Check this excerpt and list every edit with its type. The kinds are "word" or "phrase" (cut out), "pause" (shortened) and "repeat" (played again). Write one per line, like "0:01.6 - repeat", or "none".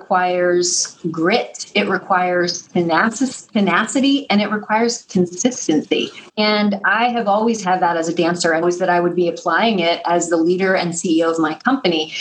0:06.3 - pause
0:08.6 - phrase